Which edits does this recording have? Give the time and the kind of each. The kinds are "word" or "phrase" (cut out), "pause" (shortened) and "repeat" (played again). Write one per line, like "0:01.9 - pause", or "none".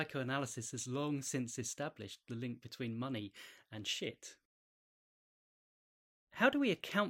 none